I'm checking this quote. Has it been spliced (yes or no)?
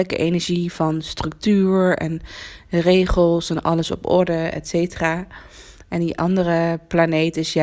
no